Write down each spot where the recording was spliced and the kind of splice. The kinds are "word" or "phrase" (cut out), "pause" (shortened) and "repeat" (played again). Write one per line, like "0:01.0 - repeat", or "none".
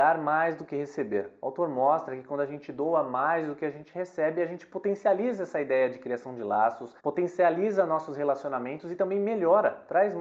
0:07.0 - pause